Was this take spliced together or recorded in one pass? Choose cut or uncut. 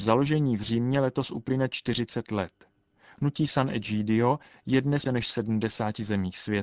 cut